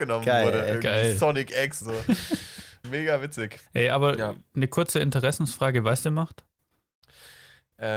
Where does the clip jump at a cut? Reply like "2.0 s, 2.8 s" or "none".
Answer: 1.8 s, 2.8 s, 3.7 s, 6.0 s